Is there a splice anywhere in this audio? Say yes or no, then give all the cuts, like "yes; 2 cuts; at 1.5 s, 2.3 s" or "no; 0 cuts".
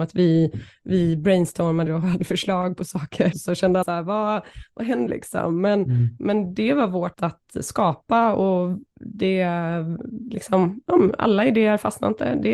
yes; 5 cuts; at 1.9 s, 3.3 s, 3.8 s, 5.1 s, 7.1 s